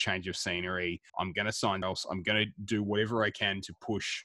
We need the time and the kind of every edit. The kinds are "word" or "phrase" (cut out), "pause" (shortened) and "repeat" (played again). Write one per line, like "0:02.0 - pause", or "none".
0:01.1 - pause
0:01.8 - word